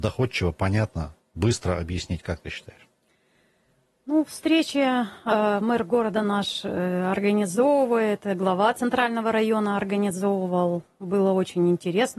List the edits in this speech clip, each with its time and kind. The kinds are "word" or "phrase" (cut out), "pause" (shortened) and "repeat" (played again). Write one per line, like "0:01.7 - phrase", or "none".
none